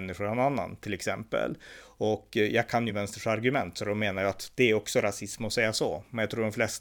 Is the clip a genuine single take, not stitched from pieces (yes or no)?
yes